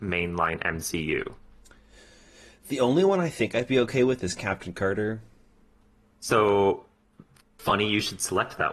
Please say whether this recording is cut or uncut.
uncut